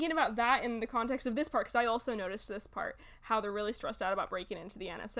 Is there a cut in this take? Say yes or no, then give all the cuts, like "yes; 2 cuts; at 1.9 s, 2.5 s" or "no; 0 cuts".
no; 0 cuts